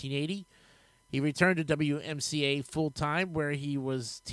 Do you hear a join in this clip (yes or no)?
no